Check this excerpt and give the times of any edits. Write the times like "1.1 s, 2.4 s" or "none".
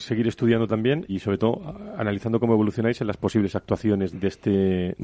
1.1 s, 4.1 s